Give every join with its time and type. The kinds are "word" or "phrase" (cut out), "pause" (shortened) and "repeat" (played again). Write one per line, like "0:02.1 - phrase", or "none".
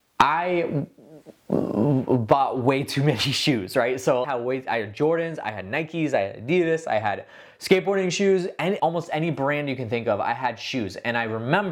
0:04.2 - phrase
0:08.8 - word